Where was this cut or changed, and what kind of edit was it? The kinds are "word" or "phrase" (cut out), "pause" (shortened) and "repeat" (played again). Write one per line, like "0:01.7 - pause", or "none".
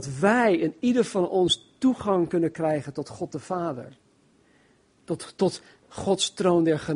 none